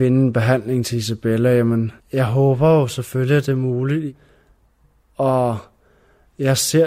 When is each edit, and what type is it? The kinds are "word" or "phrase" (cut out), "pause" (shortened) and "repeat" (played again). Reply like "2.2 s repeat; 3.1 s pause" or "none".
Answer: 2.0 s pause

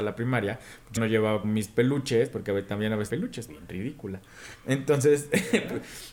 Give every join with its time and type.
1.0 s word; 1.4 s word; 3.1 s phrase; 3.5 s phrase

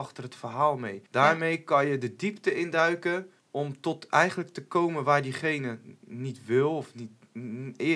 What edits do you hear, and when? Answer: 1.1 s pause; 3.4 s pause

